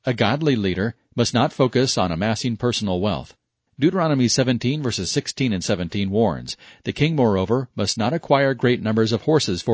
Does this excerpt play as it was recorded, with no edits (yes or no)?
yes